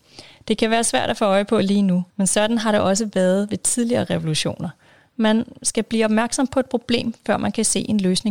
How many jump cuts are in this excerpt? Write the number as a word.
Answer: one